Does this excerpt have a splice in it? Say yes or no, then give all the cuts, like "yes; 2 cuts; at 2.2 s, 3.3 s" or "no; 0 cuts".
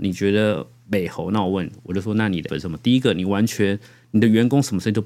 yes; 1 cut; at 2.5 s